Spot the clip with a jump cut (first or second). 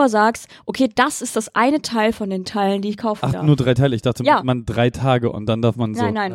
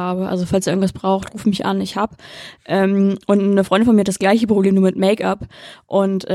first